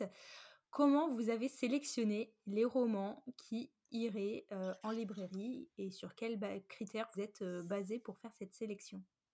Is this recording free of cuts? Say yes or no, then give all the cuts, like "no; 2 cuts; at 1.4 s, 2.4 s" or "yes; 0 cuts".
no; 1 cut; at 7.1 s